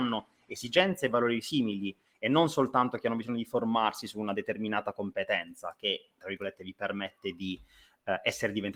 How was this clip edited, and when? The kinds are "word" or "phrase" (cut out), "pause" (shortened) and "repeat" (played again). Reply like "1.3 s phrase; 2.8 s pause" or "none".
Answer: none